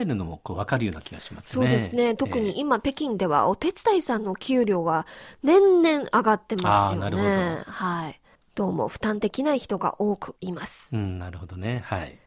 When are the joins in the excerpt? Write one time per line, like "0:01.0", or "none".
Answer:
0:08.3